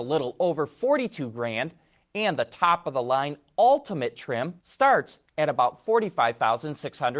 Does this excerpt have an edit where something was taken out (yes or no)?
yes